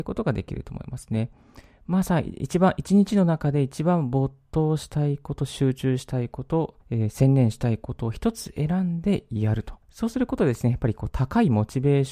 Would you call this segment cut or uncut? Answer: cut